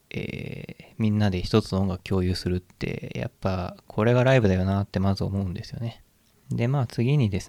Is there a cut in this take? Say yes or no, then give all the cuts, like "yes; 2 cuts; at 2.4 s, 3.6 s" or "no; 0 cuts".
no; 0 cuts